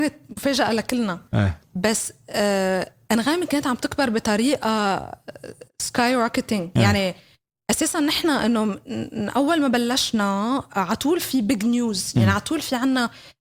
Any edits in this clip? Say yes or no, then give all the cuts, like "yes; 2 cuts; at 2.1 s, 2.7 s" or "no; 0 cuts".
no; 0 cuts